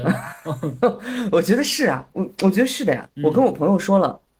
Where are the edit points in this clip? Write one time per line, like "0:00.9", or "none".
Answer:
0:02.1